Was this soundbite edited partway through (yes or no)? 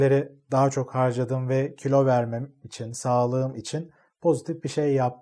no